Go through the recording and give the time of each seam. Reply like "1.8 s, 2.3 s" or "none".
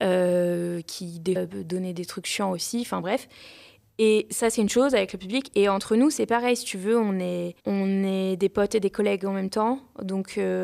1.4 s, 7.6 s